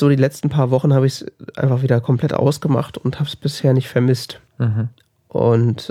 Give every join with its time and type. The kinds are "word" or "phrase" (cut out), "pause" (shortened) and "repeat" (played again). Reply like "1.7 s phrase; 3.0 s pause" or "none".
4.5 s pause